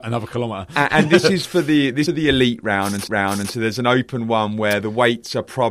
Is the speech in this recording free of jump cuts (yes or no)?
no